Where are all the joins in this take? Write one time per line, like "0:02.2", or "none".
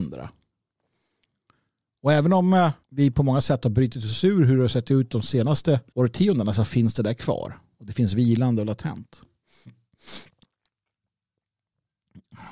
0:02.8
0:05.9